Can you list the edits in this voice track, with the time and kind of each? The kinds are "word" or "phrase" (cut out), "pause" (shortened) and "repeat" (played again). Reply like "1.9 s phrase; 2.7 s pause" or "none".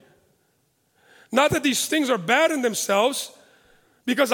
none